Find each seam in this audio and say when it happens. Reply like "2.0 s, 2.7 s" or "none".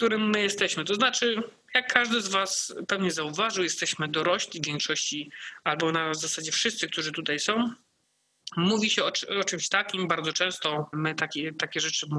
10.9 s